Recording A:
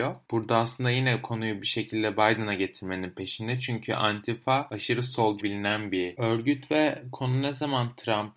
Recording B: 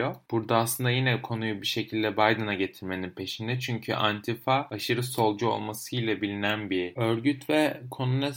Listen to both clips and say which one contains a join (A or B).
A